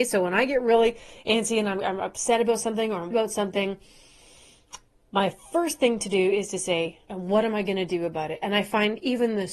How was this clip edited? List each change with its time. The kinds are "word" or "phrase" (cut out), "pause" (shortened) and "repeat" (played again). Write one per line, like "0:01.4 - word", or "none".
0:03.1 - word
0:07.0 - pause